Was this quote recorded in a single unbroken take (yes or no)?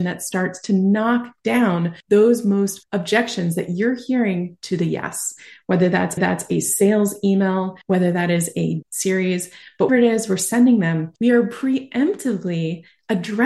no